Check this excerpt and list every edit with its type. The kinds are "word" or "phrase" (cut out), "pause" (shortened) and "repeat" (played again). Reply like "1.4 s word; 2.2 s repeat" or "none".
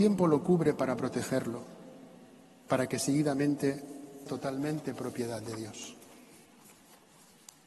4.3 s word